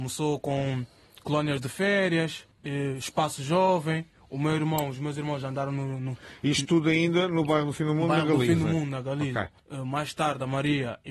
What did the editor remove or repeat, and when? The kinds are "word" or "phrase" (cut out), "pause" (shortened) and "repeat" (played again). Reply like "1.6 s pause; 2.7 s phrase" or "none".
none